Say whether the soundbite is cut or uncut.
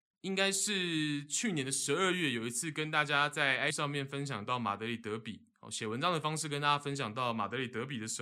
cut